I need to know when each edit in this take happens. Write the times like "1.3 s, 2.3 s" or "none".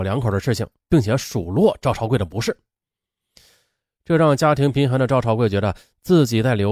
none